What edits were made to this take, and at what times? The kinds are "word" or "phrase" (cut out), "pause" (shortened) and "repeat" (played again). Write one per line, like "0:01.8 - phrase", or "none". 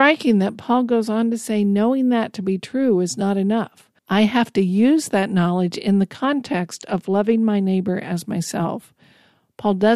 0:04.0 - pause